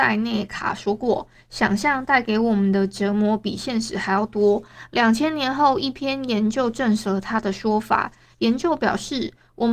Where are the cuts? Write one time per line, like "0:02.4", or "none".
none